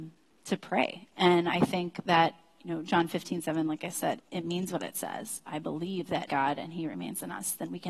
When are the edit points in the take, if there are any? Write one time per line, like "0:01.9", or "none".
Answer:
0:04.2
0:06.3